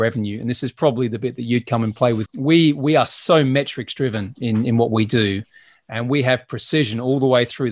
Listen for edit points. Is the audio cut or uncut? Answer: cut